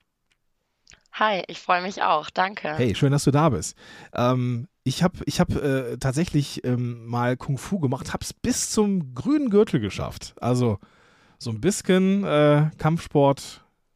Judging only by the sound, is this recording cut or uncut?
uncut